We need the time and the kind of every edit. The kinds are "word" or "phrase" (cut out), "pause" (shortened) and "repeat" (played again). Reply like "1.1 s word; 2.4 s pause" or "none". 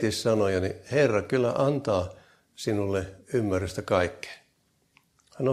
none